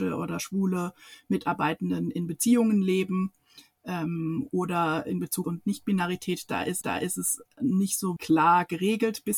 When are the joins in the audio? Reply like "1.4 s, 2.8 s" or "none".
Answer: 5.4 s, 6.8 s, 8.2 s